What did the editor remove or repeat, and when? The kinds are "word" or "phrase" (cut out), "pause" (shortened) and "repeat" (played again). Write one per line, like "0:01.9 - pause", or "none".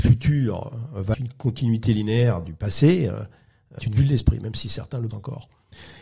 0:01.1 - word
0:03.8 - word
0:05.1 - word